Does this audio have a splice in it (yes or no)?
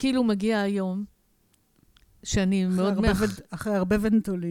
no